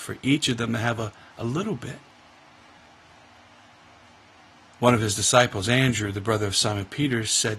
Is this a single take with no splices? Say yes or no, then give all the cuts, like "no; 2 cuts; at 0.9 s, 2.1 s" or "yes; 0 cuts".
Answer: yes; 0 cuts